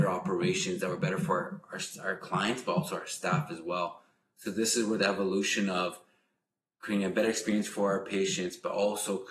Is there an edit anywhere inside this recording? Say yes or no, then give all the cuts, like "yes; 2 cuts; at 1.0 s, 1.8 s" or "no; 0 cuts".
no; 0 cuts